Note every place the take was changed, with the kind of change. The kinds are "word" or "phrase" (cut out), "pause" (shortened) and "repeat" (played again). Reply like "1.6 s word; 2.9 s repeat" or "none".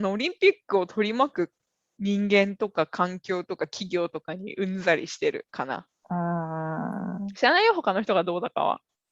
5.5 s pause